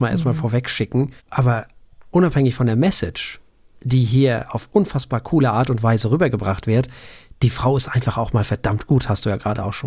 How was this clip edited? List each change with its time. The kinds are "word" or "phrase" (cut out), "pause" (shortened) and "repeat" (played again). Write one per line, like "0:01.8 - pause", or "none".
0:01.2 - pause

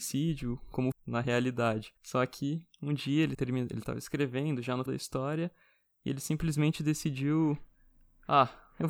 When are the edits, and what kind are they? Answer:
0:00.9 - word
0:02.0 - pause
0:03.3 - word
0:04.9 - word

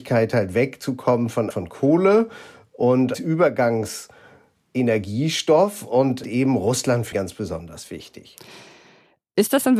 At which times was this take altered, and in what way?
0:01.5 - phrase
0:03.1 - word
0:06.2 - phrase
0:07.1 - word

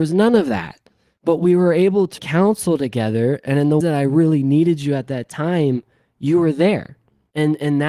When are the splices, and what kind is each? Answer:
0:02.2 - word
0:03.8 - word

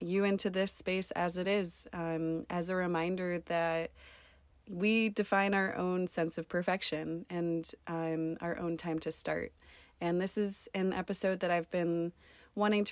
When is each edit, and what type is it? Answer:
none

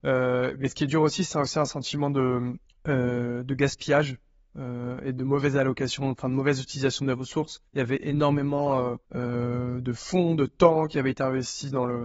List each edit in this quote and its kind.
0:02.7 - pause
0:07.7 - pause
0:09.0 - pause

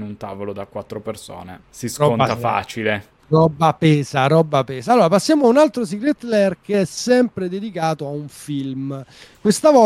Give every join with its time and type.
0:01.6 - pause
0:03.2 - pause

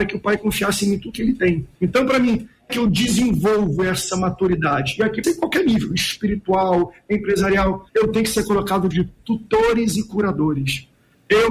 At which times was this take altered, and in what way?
0:01.1 - word
0:01.7 - pause
0:02.7 - phrase
0:05.2 - word
0:07.9 - pause
0:08.9 - word

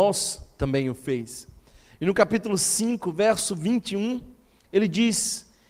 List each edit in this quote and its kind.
none

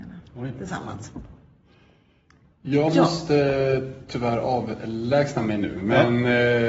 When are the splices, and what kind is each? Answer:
none

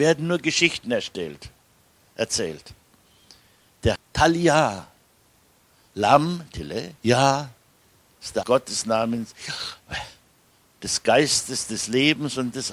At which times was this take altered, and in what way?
0:04.0 - word
0:07.0 - pause
0:08.4 - phrase

